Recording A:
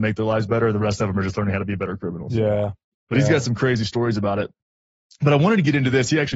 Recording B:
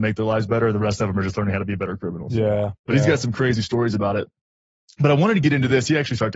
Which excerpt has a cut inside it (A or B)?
B